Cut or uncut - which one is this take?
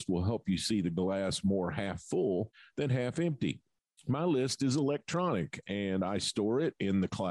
uncut